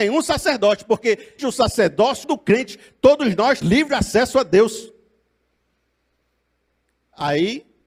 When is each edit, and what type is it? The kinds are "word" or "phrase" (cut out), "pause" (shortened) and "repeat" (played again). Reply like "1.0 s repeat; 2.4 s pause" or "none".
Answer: 1.4 s word; 2.2 s word; 3.6 s word